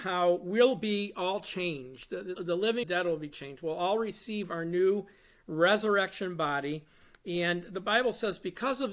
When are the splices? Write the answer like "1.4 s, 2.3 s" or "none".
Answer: 2.3 s, 2.8 s